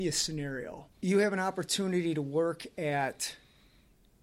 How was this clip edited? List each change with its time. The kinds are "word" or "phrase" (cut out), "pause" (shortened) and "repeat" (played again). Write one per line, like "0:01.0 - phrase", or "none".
0:00.9 - pause